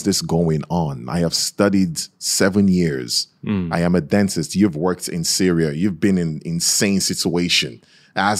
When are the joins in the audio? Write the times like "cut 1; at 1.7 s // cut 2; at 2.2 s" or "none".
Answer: none